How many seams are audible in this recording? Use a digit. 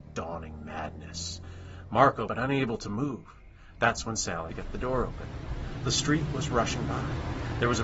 2